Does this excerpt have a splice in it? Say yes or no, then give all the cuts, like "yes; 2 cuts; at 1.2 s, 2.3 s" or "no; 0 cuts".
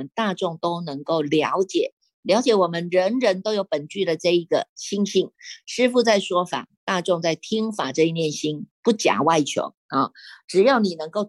no; 0 cuts